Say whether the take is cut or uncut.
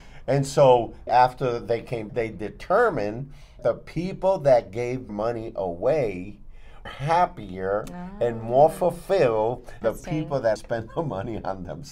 cut